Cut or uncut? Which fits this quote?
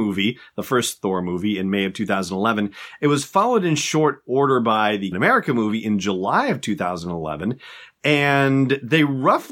cut